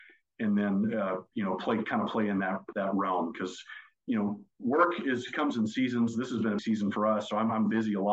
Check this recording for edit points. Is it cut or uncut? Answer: cut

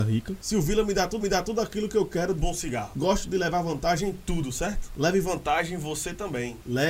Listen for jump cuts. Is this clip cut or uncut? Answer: cut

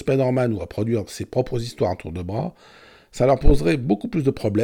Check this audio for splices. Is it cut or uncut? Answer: uncut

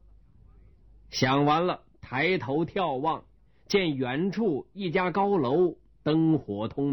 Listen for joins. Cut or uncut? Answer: uncut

